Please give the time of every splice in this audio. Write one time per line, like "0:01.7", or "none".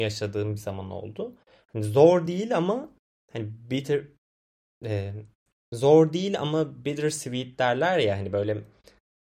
none